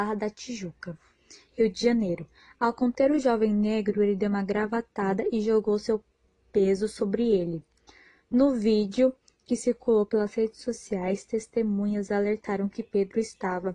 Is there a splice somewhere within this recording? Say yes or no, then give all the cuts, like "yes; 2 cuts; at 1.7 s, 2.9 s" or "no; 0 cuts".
no; 0 cuts